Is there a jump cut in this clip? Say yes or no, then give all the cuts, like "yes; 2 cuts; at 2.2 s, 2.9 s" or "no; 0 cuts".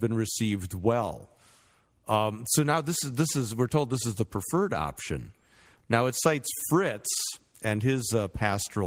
no; 0 cuts